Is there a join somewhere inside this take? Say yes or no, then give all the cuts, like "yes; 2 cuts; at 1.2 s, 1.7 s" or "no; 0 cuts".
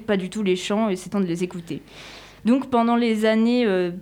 yes; 1 cut; at 1.1 s